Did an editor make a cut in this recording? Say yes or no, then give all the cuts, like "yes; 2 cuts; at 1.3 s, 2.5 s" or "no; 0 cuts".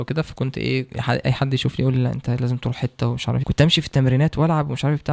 yes; 1 cut; at 3.4 s